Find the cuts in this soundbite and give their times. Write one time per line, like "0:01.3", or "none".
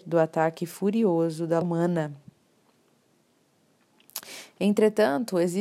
0:01.6